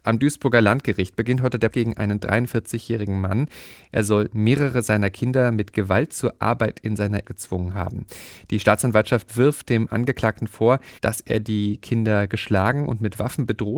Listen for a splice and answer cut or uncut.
cut